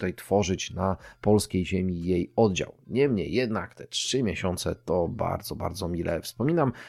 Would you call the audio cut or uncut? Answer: uncut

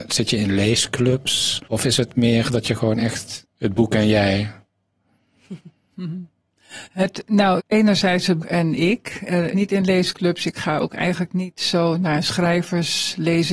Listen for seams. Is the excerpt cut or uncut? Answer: cut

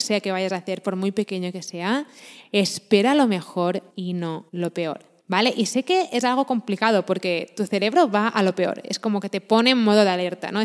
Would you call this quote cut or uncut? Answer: cut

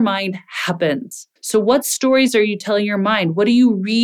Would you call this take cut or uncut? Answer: cut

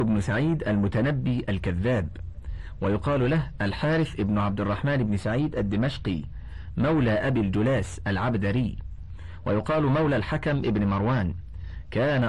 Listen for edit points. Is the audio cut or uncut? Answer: uncut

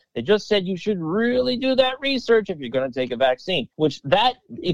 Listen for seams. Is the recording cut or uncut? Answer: cut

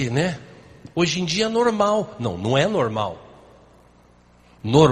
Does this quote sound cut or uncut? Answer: uncut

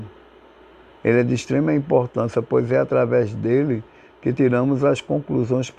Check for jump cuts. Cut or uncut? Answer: uncut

